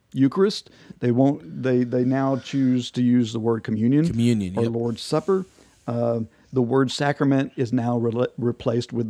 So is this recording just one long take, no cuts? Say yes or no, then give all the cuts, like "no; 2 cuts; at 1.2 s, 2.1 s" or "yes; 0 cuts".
yes; 0 cuts